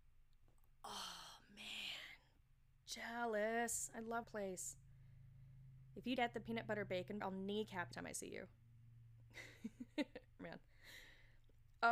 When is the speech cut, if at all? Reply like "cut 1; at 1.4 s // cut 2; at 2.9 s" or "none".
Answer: cut 1; at 4.2 s // cut 2; at 6.2 s // cut 3; at 7.2 s // cut 4; at 7.9 s // cut 5; at 10.4 s

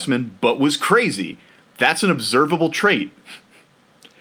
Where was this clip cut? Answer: none

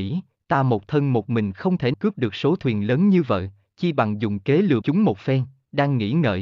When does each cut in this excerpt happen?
cut 1; at 1.9 s // cut 2; at 4.8 s

